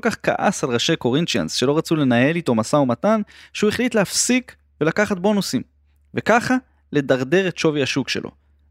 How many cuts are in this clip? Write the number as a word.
zero